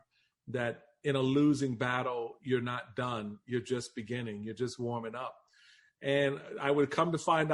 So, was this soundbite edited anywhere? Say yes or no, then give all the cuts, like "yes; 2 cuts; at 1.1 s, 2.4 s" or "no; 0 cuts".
no; 0 cuts